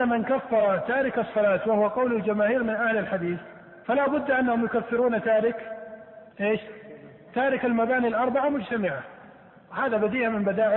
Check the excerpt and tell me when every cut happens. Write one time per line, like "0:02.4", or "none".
0:03.8
0:06.3